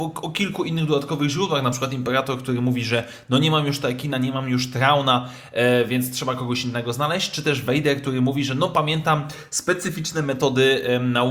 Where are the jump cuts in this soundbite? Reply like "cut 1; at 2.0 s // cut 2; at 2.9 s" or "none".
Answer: none